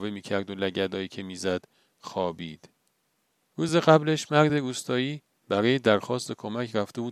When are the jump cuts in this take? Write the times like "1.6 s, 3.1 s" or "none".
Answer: none